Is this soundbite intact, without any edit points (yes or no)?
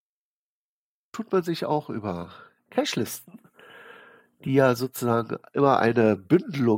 yes